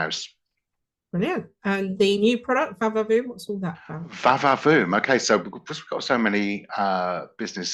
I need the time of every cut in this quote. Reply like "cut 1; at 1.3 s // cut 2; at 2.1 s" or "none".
none